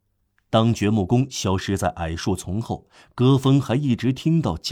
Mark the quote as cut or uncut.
uncut